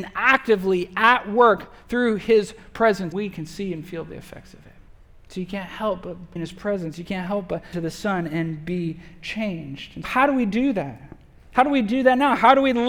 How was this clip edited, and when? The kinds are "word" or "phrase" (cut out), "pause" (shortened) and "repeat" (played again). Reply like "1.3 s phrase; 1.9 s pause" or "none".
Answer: 3.1 s word; 4.9 s pause; 6.4 s word; 7.7 s word; 10.0 s word